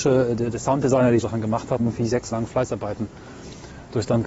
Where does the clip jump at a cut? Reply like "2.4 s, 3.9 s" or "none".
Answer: 1.2 s, 1.8 s, 2.3 s